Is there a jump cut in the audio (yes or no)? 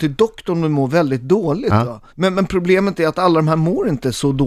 yes